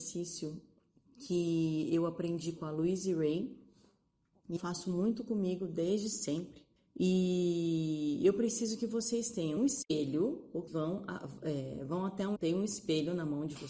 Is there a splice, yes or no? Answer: yes